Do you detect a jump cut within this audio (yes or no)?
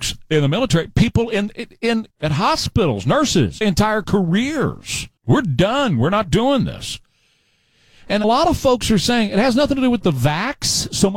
yes